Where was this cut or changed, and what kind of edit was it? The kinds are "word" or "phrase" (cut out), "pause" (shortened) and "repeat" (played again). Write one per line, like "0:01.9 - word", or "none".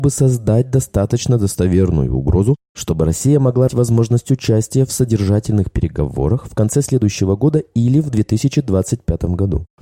0:03.7 - word